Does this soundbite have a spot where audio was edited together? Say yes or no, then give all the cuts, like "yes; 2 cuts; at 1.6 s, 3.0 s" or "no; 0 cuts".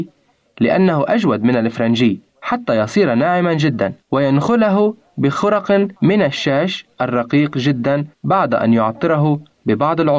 yes; 4 cuts; at 2.3 s, 4.0 s, 6.0 s, 8.1 s